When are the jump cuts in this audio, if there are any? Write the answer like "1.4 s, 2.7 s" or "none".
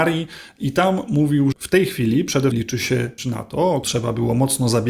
1.5 s, 2.5 s, 3.2 s, 3.8 s